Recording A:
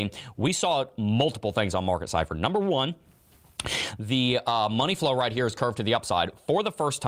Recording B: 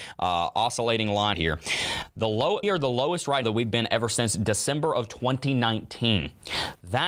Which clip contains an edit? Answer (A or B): B